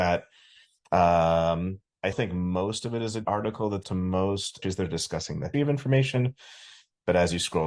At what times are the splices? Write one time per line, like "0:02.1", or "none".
0:02.1
0:03.2
0:03.8
0:04.6
0:05.5